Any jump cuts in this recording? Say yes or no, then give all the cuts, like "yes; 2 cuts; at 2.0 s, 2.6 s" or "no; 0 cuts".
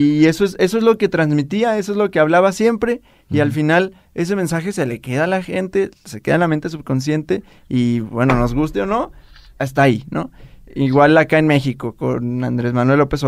no; 0 cuts